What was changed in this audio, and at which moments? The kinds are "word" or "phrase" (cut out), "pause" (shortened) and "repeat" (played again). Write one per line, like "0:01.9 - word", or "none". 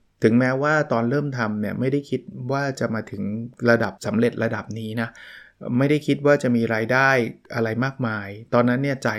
0:04.0 - pause

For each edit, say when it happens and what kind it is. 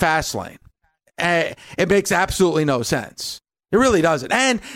none

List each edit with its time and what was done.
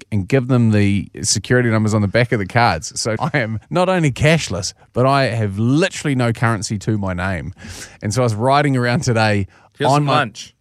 0:03.2 - word
0:03.6 - pause

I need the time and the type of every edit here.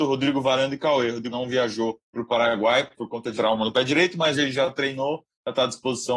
0:01.3 - word
0:02.0 - pause
0:03.3 - word
0:04.3 - word

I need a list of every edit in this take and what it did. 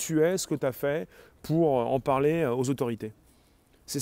none

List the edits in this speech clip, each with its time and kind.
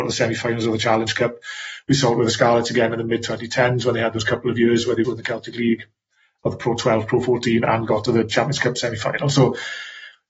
0:05.0 - word

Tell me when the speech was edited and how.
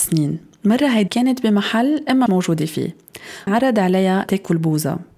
0:01.1 - word
0:02.3 - word
0:03.5 - word
0:04.3 - word

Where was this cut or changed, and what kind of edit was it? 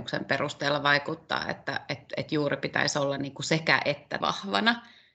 0:04.2 - word

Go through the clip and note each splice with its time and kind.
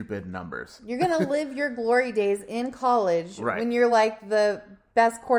none

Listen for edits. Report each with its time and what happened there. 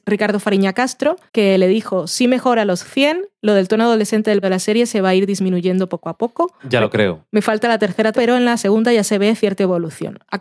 0:01.3 - pause
0:04.4 - word
0:06.6 - pause
0:08.1 - word

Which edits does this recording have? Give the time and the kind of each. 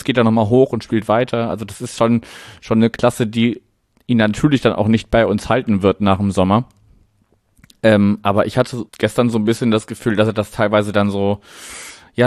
0:08.9 - pause

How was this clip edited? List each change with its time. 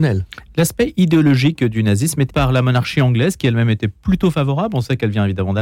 0:02.3 - word

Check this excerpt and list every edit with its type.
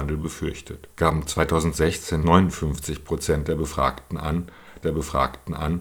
0:00.9 - pause
0:02.2 - word
0:04.8 - repeat

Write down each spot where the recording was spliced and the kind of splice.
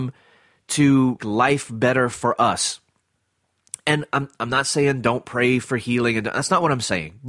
0:01.2 - word

